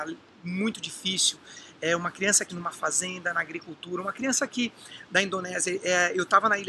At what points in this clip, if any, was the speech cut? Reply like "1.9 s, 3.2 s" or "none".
2.5 s